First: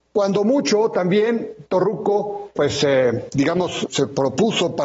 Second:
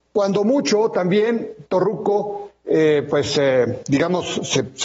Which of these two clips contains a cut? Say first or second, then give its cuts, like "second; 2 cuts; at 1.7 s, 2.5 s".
first; 2 cuts; at 2.6 s, 3.9 s